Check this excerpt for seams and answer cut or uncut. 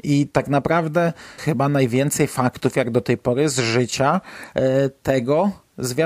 cut